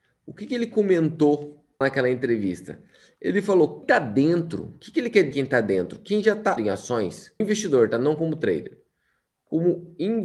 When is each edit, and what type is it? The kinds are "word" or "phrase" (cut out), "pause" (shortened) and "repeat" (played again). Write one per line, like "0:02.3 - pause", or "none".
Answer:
0:01.8 - word
0:03.8 - word
0:05.3 - word
0:06.6 - word
0:07.4 - word